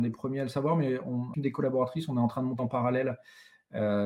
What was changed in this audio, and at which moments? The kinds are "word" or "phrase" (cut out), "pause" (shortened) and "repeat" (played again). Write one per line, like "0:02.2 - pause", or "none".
0:01.3 - word
0:02.6 - phrase